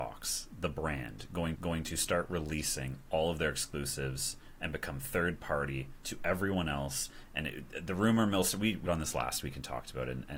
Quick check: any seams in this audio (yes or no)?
yes